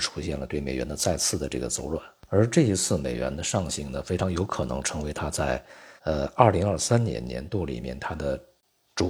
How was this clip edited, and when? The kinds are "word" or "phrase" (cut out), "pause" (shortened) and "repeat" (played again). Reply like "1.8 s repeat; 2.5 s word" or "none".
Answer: 2.2 s pause; 6.0 s pause